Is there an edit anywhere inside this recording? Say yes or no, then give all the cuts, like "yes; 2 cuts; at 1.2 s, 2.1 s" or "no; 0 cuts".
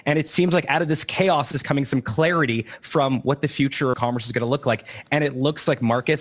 yes; 1 cut; at 3.9 s